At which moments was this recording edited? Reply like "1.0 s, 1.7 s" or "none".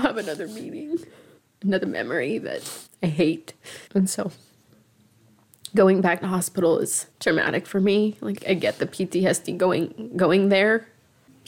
1.4 s, 2.9 s, 3.9 s, 6.2 s, 7.1 s, 8.4 s